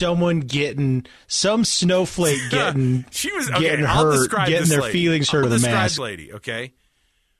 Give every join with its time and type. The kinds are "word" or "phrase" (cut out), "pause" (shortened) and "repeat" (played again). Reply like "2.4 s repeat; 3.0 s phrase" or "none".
5.4 s word; 6.0 s word